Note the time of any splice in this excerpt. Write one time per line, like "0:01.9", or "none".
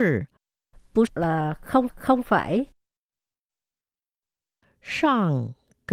0:01.1
0:01.9